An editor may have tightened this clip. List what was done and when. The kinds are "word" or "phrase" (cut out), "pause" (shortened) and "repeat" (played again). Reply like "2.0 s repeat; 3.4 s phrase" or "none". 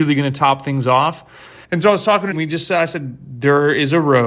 1.6 s pause; 2.3 s word